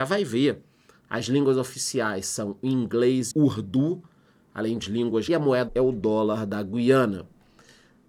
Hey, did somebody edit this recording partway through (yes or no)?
yes